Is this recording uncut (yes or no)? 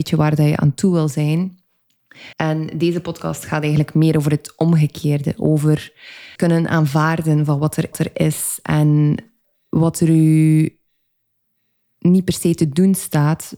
no